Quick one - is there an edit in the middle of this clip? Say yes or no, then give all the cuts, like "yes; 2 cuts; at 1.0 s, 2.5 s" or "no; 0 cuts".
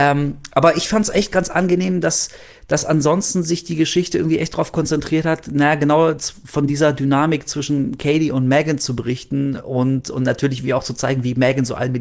no; 0 cuts